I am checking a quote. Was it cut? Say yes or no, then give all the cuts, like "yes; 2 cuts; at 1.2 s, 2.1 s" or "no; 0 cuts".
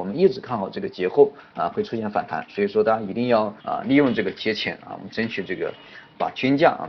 yes; 1 cut; at 3.6 s